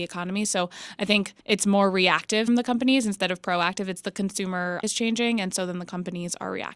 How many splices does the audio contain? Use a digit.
3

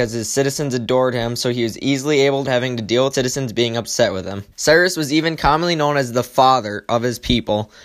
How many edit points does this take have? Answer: 3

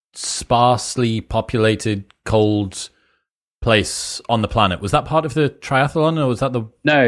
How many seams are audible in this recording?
0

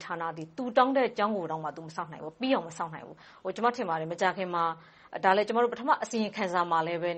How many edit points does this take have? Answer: 0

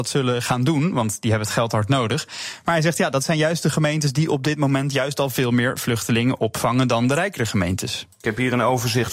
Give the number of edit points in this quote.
0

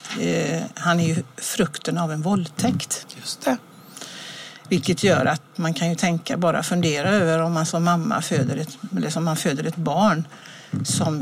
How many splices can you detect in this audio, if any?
0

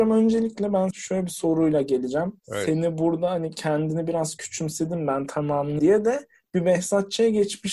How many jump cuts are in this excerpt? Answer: 2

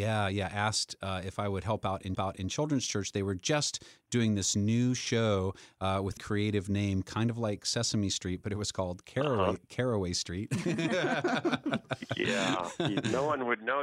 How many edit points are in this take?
2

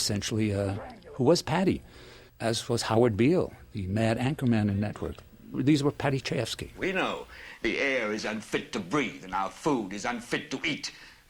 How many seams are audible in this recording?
1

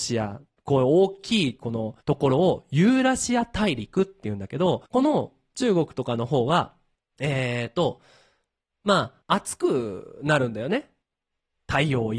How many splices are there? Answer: 4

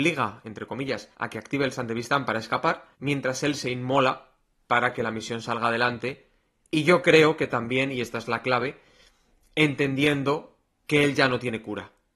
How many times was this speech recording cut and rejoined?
2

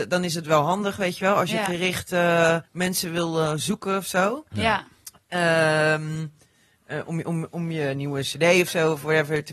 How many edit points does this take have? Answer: 1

